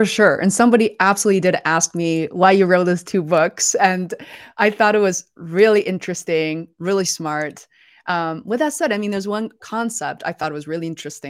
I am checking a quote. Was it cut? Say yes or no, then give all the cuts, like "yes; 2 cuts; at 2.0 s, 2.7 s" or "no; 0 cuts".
no; 0 cuts